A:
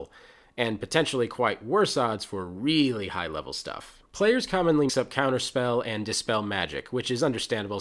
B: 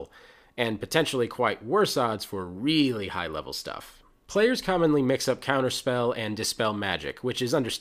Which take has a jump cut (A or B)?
A